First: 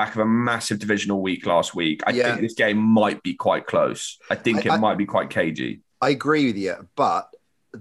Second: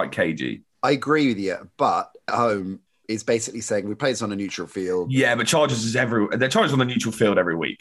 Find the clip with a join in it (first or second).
second